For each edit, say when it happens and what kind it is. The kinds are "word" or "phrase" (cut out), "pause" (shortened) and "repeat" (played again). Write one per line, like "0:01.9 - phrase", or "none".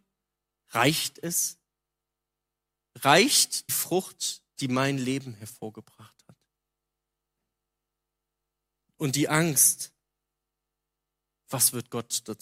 0:03.7 - word